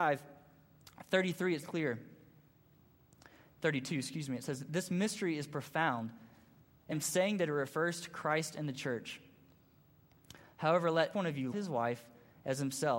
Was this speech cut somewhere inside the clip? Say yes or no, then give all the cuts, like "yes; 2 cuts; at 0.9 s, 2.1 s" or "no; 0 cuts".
yes; 4 cuts; at 1.6 s, 6.9 s, 11.1 s, 11.5 s